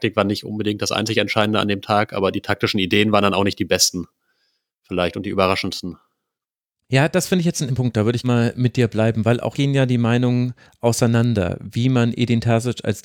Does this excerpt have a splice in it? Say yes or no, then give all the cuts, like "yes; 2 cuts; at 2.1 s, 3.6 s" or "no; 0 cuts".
yes; 3 cuts; at 7.7 s, 8.2 s, 9.5 s